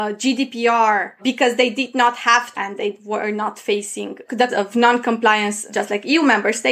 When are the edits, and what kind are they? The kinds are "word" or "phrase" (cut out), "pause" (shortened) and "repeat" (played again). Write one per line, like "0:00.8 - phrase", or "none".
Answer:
0:02.5 - phrase
0:04.5 - word